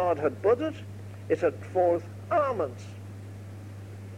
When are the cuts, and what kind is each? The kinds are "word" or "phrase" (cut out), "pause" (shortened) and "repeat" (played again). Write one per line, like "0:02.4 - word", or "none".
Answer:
0:01.6 - phrase